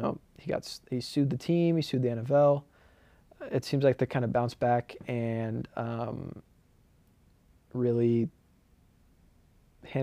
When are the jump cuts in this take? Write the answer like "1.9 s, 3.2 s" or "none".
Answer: none